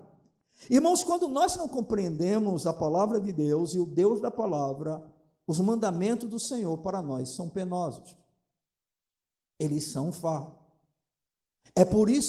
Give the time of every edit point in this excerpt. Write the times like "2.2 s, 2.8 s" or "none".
none